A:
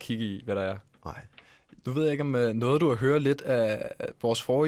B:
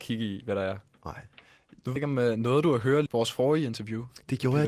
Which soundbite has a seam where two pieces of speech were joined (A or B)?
B